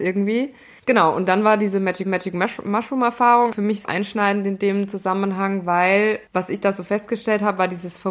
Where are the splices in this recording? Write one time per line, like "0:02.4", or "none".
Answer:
0:02.1
0:03.5
0:03.8